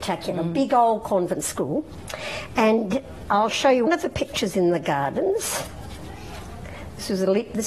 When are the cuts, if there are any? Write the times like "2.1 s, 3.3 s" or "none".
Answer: 3.9 s

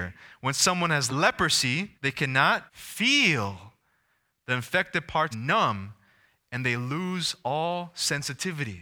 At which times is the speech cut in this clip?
1.1 s, 1.9 s, 2.7 s, 5.3 s

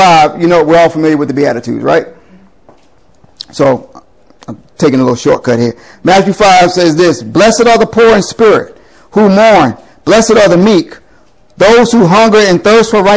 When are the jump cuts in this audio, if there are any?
none

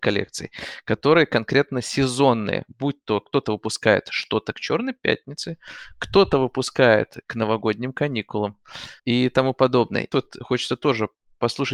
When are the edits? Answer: 9.0 s, 10.1 s

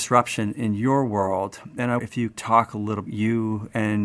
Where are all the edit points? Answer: 2.0 s, 2.3 s, 3.1 s

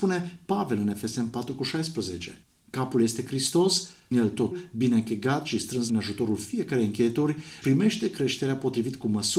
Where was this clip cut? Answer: 2.4 s, 4.1 s, 4.5 s, 5.9 s, 7.6 s

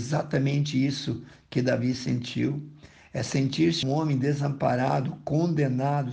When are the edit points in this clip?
3.8 s

